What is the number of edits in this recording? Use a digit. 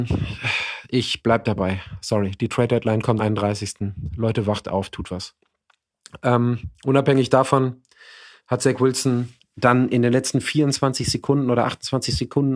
1